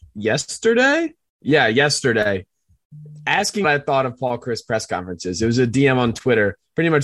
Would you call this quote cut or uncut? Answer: cut